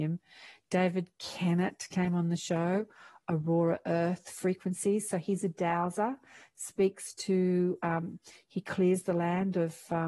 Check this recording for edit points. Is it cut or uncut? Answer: uncut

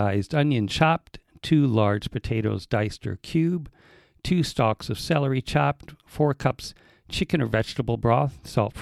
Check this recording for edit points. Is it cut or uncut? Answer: uncut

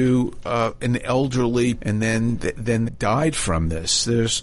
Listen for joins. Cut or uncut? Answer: cut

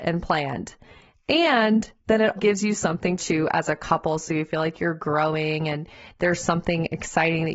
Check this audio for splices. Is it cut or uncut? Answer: cut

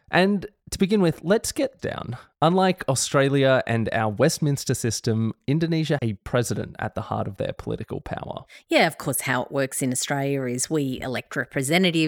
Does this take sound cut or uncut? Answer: cut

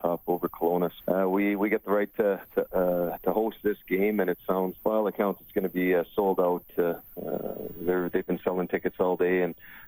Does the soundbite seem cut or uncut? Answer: cut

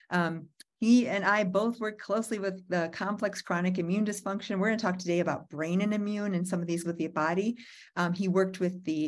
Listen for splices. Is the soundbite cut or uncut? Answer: cut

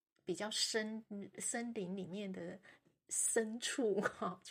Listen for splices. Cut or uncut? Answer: uncut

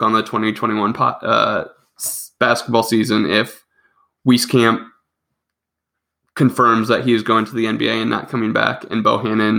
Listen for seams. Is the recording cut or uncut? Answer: uncut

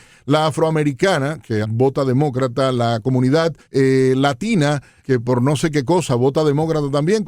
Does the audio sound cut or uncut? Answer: cut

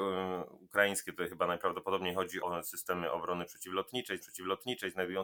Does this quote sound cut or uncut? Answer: cut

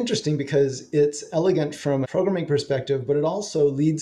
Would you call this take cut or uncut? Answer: cut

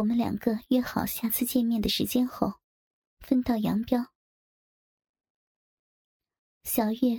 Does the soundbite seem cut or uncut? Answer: uncut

